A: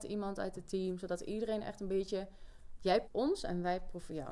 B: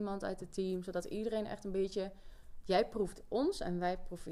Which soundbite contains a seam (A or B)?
A